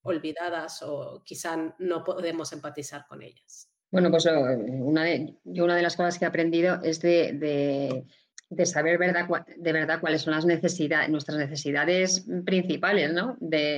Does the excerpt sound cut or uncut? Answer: cut